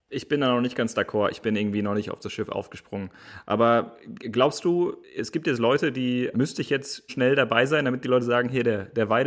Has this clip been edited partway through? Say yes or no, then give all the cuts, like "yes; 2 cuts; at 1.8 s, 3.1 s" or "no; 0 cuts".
yes; 3 cuts; at 5.0 s, 6.3 s, 7.1 s